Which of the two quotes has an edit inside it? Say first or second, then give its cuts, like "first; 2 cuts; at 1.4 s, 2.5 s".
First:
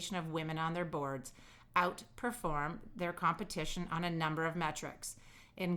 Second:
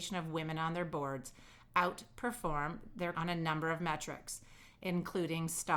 second; 1 cut; at 3.1 s